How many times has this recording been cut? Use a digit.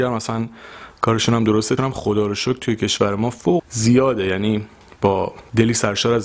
2